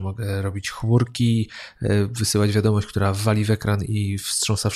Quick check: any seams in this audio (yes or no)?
no